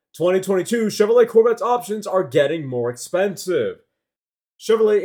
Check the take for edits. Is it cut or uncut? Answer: uncut